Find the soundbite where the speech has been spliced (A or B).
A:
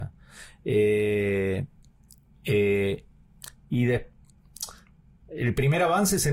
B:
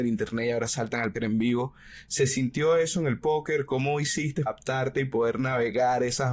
B